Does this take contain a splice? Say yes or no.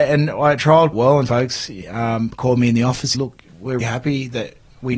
yes